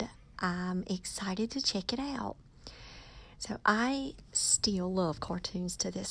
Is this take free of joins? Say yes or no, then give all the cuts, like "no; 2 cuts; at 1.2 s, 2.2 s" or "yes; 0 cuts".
yes; 0 cuts